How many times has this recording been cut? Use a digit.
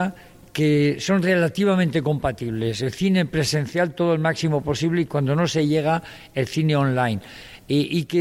0